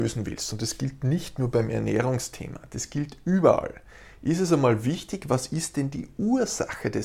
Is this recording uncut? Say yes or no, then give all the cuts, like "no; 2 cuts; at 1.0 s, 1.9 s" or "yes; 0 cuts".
yes; 0 cuts